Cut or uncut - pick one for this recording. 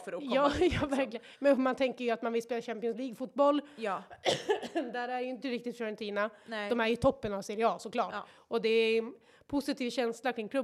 uncut